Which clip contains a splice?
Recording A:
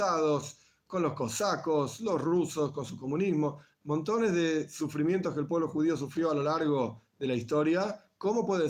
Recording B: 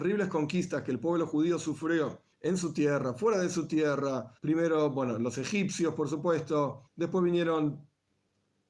B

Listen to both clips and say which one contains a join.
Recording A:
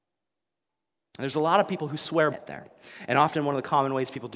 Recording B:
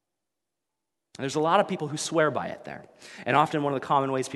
A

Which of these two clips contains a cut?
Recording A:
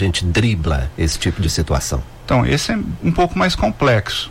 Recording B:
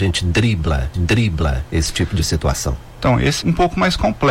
B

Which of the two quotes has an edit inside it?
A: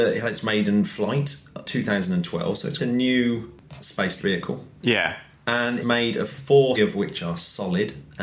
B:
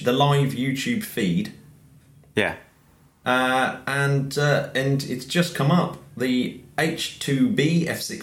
A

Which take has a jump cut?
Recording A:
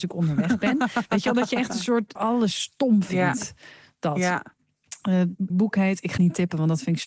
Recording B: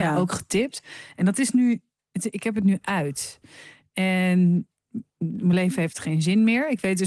A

